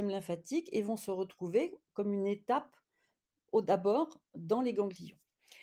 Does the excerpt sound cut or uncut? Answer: uncut